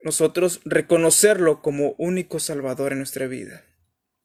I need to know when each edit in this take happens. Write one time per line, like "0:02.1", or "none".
none